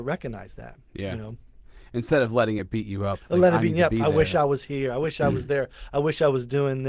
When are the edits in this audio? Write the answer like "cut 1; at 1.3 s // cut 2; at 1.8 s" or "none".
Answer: none